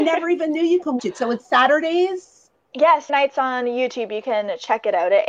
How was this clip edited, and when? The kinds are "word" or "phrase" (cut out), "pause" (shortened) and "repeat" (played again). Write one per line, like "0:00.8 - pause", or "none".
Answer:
0:01.0 - word
0:01.4 - word
0:03.1 - word